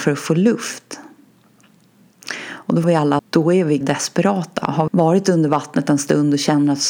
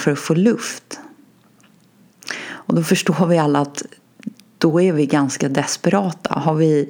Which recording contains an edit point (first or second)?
first